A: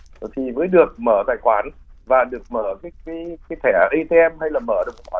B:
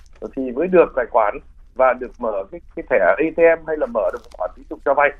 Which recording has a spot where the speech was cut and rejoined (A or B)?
B